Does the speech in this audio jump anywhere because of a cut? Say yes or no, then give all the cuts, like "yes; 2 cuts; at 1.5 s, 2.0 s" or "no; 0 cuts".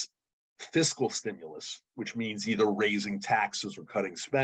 no; 0 cuts